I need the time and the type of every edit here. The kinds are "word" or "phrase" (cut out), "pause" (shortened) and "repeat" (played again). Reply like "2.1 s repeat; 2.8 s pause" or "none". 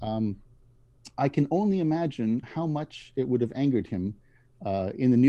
2.4 s word